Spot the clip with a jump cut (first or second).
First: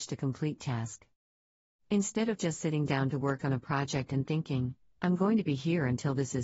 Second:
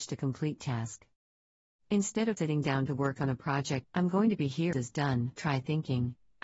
second